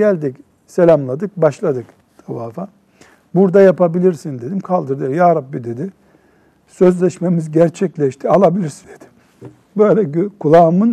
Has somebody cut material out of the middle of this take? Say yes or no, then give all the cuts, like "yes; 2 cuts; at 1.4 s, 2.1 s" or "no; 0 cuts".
yes; 1 cut; at 8.8 s